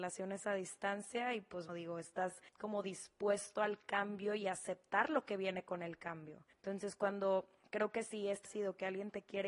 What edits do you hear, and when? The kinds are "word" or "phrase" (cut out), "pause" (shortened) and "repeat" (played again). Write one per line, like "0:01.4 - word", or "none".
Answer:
0:01.7 - word
0:02.5 - pause
0:06.5 - pause
0:08.4 - phrase